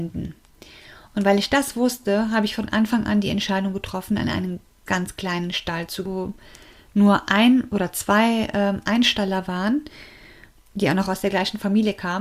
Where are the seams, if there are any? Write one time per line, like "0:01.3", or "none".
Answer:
0:04.9
0:06.1

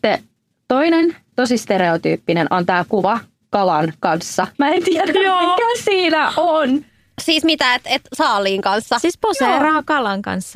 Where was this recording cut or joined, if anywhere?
0:04.5

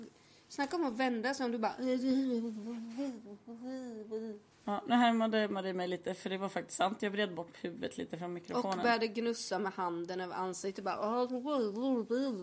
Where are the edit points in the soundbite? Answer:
0:04.5

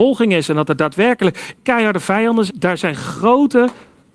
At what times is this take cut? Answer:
0:01.6
0:02.5

